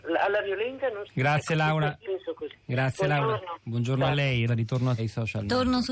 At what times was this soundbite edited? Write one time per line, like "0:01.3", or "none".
0:01.0
0:02.0
0:04.5
0:05.0

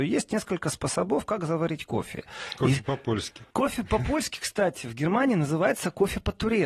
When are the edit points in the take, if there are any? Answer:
0:03.5

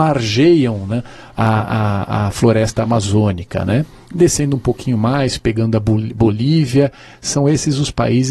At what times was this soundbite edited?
none

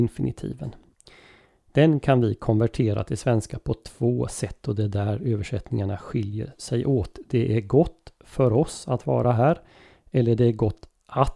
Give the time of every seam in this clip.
none

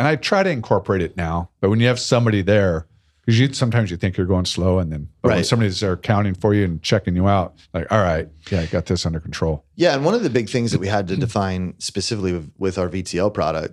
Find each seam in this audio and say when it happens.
0:01.6
0:03.1
0:07.6

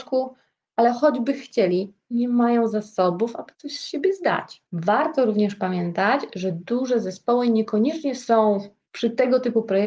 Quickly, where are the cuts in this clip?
0:04.7

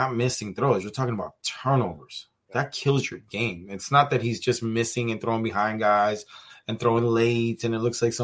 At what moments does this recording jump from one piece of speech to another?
none

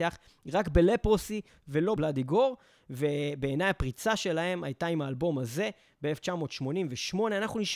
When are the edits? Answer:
0:02.0

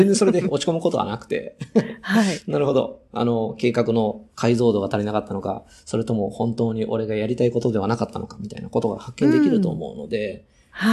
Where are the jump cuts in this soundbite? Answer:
0:04.3

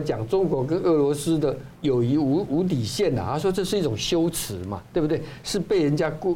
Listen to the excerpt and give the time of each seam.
0:01.8

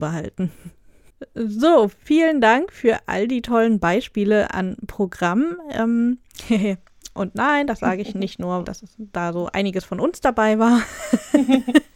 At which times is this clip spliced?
0:08.6

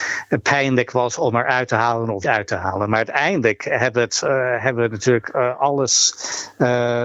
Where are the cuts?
0:02.2

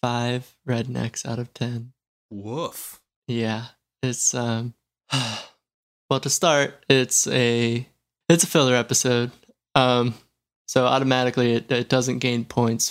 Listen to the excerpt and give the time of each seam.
none

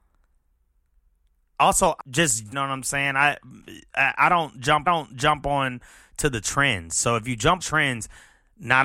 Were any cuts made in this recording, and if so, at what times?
0:02.0
0:02.5
0:04.9
0:07.6

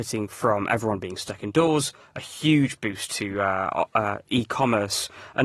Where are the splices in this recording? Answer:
none

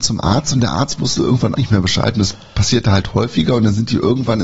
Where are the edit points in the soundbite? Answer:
0:01.5

